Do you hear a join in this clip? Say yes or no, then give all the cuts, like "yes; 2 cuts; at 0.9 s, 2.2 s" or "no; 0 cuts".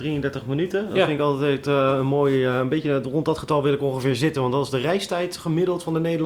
no; 0 cuts